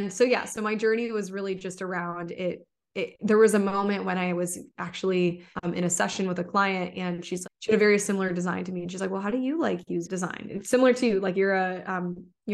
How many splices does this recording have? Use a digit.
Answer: 3